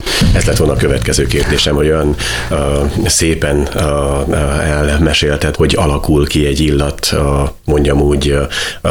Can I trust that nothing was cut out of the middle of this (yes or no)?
no